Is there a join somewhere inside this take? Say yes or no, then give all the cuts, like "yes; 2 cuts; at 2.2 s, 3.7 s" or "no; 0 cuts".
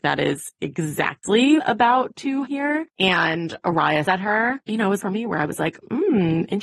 yes; 5 cuts; at 1.6 s, 2.5 s, 4.1 s, 4.6 s, 5.0 s